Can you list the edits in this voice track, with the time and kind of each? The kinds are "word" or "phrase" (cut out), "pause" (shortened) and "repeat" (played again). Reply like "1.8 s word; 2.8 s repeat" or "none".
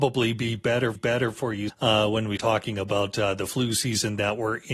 1.0 s repeat; 1.7 s word; 2.4 s word

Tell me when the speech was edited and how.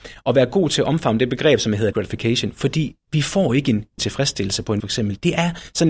1.9 s word; 4.0 s word; 4.8 s word

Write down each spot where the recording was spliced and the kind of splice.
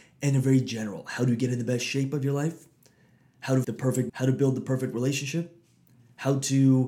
3.6 s word; 4.1 s word

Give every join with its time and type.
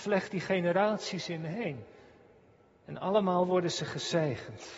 none

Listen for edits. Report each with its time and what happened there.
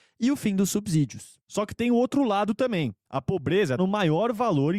3.8 s word

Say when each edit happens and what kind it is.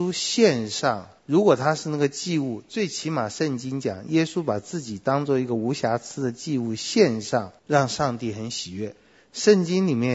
1.2 s pause; 7.6 s pause

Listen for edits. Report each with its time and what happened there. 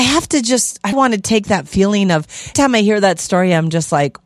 0.9 s word; 2.5 s word

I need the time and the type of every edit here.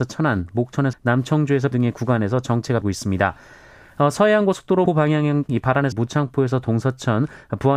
0.9 s word; 1.7 s word; 2.8 s word; 4.9 s word; 5.5 s word; 5.9 s word

